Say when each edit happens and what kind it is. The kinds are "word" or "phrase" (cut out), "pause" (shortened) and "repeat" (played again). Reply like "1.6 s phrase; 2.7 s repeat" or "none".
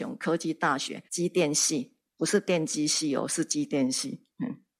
1.1 s pause